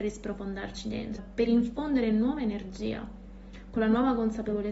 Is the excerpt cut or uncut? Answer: cut